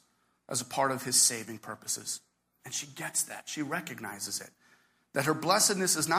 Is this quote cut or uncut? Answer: uncut